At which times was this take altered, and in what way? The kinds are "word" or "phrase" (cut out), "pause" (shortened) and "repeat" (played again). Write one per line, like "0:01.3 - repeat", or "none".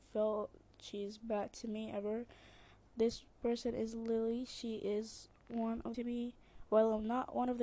0:05.4 - pause
0:05.9 - phrase